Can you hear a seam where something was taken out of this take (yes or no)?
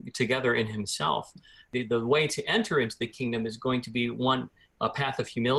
no